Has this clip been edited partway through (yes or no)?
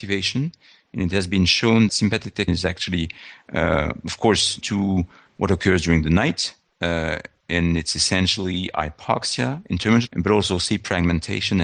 yes